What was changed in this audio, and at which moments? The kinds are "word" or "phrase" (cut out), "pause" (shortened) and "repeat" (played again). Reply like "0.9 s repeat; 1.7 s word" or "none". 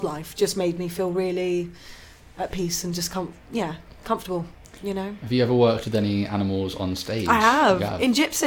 none